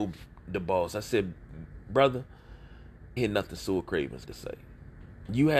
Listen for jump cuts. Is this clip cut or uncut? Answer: cut